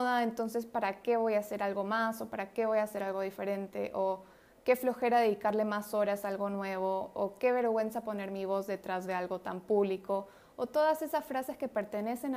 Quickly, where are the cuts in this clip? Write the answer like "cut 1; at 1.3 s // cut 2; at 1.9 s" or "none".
none